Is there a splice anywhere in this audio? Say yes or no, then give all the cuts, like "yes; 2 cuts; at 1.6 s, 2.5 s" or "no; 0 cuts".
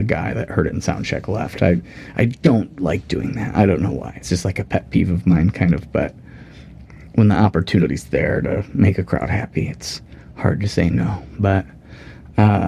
no; 0 cuts